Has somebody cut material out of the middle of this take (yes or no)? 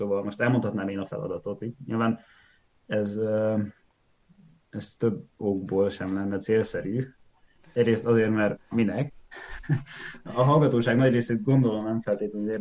no